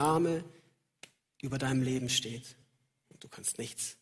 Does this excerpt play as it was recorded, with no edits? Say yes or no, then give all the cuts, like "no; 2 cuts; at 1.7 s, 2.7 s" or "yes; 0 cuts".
yes; 0 cuts